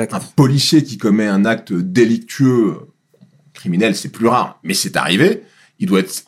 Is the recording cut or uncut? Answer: uncut